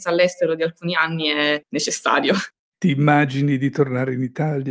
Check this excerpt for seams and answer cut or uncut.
uncut